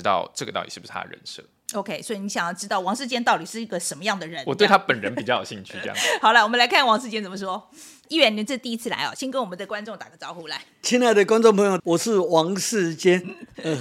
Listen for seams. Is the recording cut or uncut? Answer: cut